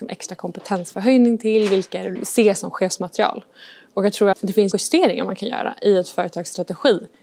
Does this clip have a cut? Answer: yes; 3 cuts; at 2.2 s, 4.3 s, 4.7 s

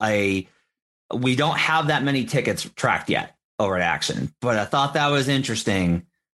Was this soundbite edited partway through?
no; 0 cuts

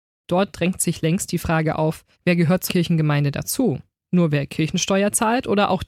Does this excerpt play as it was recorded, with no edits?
no; 2 cuts; at 2.1 s, 2.7 s

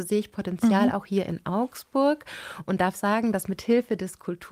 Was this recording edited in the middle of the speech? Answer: no; 0 cuts

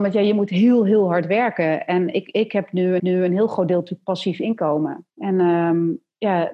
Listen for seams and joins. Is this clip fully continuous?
no; 2 cuts; at 3.0 s, 5.1 s

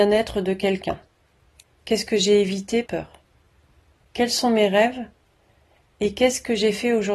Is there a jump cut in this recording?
yes; 1 cut; at 2.9 s

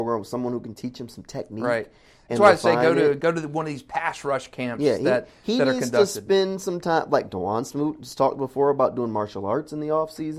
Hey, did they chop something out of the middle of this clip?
no; 0 cuts

